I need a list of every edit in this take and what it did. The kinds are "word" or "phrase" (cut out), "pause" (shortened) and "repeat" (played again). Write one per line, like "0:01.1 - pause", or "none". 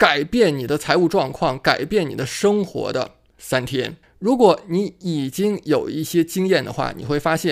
0:04.0 - pause